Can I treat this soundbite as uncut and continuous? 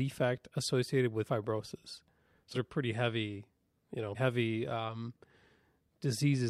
no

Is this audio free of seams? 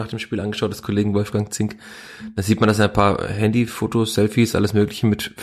yes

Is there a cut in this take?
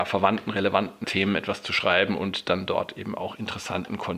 yes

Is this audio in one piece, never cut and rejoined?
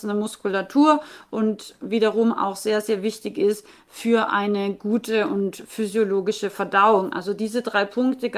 yes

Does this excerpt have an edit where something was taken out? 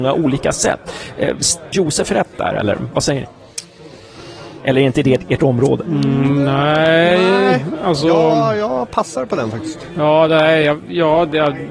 yes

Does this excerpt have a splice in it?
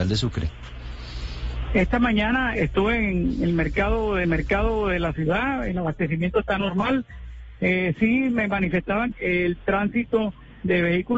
yes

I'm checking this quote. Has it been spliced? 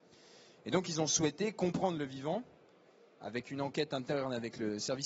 no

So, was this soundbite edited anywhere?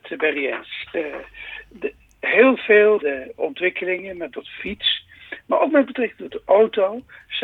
yes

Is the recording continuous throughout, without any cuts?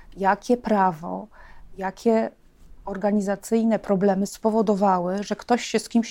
yes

